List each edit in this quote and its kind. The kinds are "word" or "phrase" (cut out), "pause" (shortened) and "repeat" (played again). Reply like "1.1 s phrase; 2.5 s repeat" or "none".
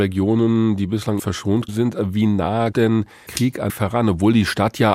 1.2 s word; 1.7 s word; 2.7 s word; 3.3 s word; 3.7 s word